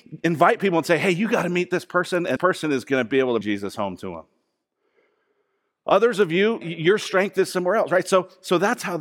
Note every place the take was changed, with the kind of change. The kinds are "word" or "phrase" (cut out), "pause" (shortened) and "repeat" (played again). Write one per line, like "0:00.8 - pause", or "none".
0:02.4 - word
0:03.4 - word
0:06.6 - word